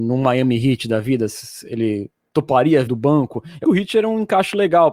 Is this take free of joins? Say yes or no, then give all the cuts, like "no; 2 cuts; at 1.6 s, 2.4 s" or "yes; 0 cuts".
no; 2 cuts; at 2.9 s, 3.6 s